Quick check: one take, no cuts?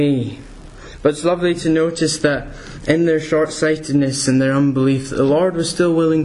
yes; 0 cuts

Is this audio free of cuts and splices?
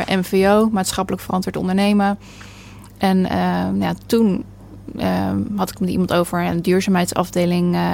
yes; 0 cuts

